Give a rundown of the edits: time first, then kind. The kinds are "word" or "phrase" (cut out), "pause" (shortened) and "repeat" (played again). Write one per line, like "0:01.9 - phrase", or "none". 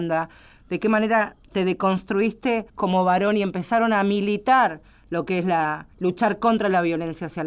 0:02.7 - pause
0:05.9 - pause